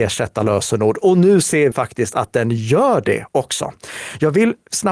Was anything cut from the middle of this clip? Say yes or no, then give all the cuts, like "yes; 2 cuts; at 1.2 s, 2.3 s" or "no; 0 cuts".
yes; 1 cut; at 1.7 s